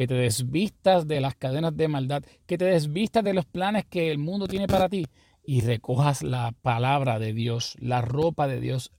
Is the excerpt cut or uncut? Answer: uncut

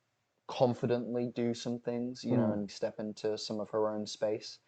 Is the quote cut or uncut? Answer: cut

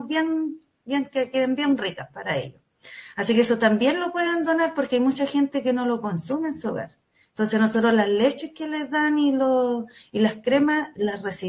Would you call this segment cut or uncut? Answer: uncut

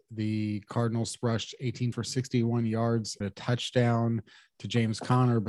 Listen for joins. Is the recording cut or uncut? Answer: cut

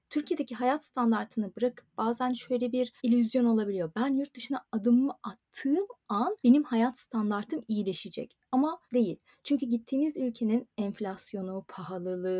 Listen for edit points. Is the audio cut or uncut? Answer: cut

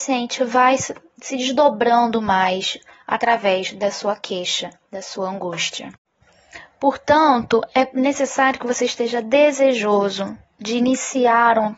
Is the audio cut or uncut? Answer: uncut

